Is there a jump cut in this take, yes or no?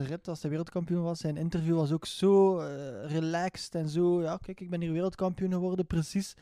no